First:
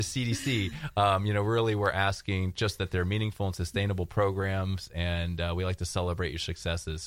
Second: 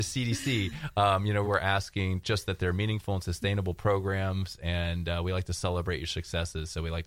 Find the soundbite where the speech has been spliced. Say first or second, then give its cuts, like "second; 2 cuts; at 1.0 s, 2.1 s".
second; 1 cut; at 1.4 s